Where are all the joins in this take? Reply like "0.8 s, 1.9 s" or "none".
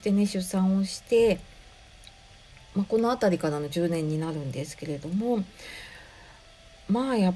none